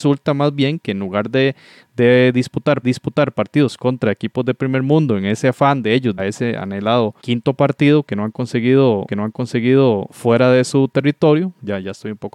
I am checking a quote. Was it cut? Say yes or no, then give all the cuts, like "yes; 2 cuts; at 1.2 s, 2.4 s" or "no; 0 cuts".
yes; 4 cuts; at 2.8 s, 6.2 s, 7.2 s, 9.1 s